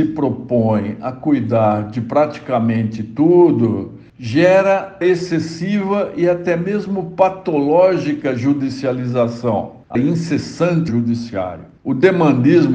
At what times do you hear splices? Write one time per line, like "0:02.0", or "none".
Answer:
0:05.0
0:10.0
0:10.9